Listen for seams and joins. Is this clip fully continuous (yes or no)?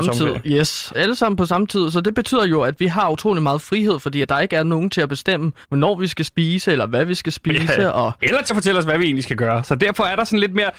no